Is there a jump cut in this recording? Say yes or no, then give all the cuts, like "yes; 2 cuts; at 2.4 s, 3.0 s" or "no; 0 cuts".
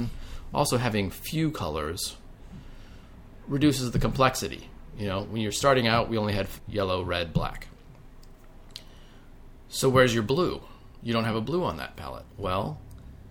yes; 1 cut; at 6.6 s